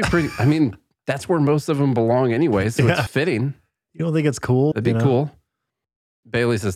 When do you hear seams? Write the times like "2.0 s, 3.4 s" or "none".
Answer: 3.1 s, 4.7 s